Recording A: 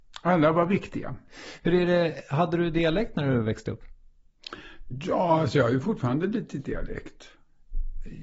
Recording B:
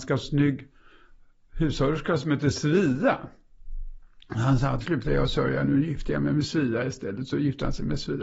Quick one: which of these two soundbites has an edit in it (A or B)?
B